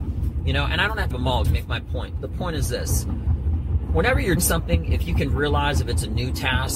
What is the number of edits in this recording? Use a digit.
3